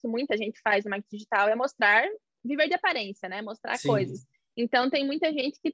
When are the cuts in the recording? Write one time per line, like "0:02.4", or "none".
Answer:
none